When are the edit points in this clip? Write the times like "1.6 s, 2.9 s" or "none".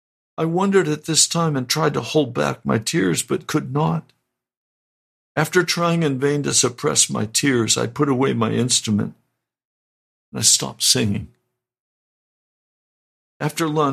none